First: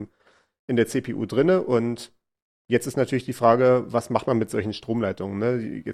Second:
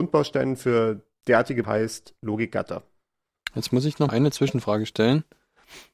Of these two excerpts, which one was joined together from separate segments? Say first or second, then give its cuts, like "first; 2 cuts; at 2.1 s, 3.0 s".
second; 2 cuts; at 1.6 s, 4.1 s